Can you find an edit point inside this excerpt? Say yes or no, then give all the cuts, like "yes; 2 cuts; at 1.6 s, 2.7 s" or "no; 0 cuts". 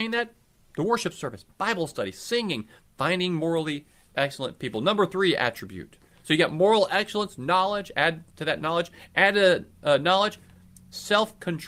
no; 0 cuts